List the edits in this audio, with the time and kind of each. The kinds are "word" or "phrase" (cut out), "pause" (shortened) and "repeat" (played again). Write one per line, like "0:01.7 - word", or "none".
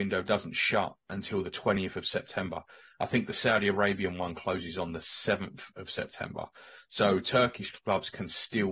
none